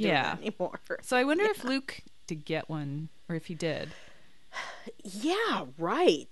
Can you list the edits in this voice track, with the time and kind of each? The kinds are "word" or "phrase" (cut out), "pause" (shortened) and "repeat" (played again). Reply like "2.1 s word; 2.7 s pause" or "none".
2.3 s phrase